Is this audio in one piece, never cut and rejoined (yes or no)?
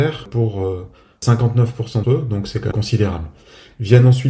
no